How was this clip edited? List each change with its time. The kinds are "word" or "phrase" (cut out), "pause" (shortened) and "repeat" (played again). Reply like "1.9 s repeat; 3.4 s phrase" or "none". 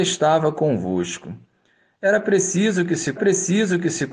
3.2 s repeat

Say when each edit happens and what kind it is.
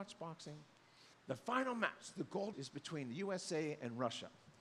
1.1 s pause; 2.5 s word

